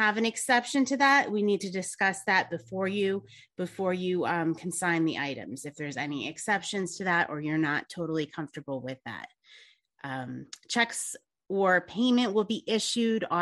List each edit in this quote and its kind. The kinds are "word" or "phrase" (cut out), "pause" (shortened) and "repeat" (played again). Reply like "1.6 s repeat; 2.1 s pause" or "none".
none